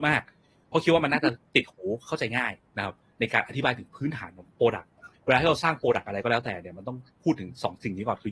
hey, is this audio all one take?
no; 1 cut; at 5.1 s

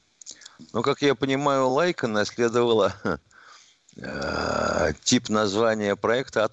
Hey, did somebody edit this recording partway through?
no; 0 cuts

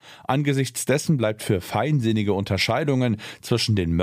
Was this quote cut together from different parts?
no; 0 cuts

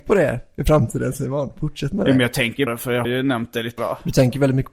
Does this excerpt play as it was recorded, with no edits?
no; 3 cuts; at 2.7 s, 3.0 s, 3.8 s

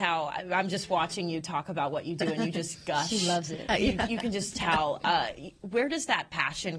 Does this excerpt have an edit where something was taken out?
no; 0 cuts

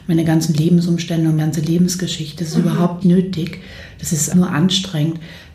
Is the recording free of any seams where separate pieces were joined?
no; 3 cuts; at 1.4 s, 3.0 s, 4.3 s

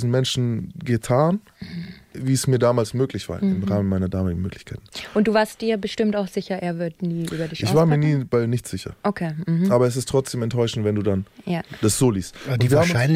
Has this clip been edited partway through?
no; 0 cuts

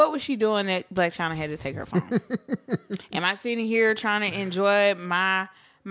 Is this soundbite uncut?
yes; 0 cuts

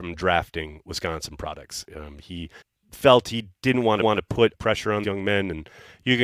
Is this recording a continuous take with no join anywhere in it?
no; 4 cuts; at 2.6 s, 4.0 s, 4.5 s, 5.0 s

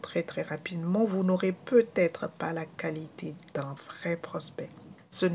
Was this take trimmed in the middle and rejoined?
no; 0 cuts

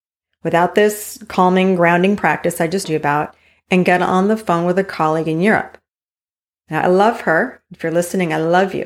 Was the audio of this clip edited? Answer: yes; 1 cut; at 2.8 s

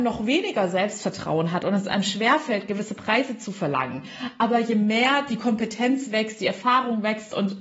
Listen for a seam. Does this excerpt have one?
no; 0 cuts

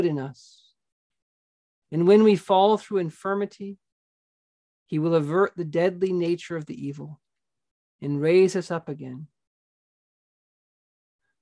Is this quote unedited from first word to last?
yes; 0 cuts

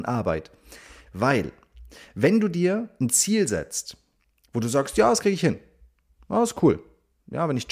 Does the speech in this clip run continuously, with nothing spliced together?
yes; 0 cuts

